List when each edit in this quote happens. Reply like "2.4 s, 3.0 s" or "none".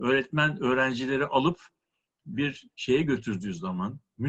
none